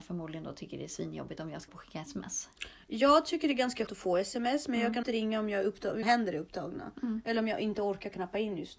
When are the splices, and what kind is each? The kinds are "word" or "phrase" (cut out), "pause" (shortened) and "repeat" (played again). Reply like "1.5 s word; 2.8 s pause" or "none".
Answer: 1.7 s word; 3.9 s word; 5.0 s word; 6.0 s word